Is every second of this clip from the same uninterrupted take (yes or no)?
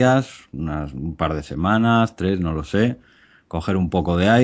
yes